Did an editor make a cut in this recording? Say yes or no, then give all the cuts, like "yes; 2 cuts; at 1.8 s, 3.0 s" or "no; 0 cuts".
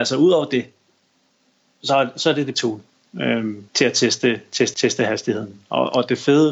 yes; 3 cuts; at 2.5 s, 3.7 s, 4.7 s